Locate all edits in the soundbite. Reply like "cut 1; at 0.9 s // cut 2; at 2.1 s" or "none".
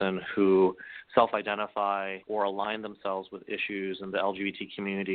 cut 1; at 2.2 s